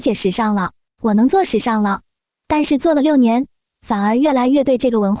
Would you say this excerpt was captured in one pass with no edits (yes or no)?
yes